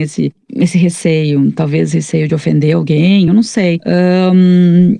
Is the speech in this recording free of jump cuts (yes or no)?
yes